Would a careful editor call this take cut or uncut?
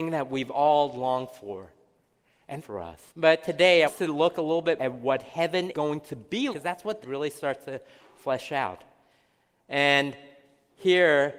cut